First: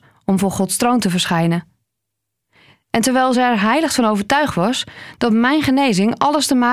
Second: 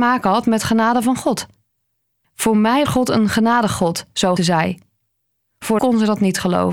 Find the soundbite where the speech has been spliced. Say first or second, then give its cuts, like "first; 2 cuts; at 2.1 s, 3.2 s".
second; 3 cuts; at 2.9 s, 4.4 s, 5.8 s